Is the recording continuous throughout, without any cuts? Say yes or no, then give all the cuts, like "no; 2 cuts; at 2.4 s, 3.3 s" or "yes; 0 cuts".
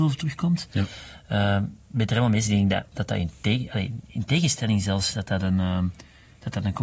no; 1 cut; at 2.9 s